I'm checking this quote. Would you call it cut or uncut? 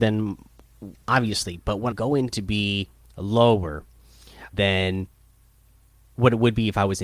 cut